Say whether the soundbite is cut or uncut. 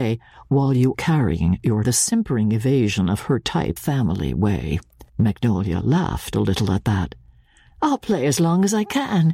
cut